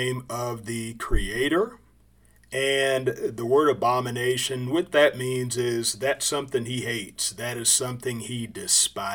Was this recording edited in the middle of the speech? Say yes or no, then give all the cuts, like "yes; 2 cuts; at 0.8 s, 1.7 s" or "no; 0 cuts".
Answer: no; 0 cuts